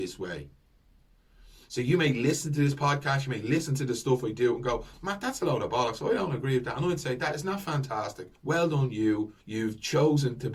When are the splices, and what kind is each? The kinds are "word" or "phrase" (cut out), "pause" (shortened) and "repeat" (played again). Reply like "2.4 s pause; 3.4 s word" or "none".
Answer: 8.4 s pause; 9.4 s pause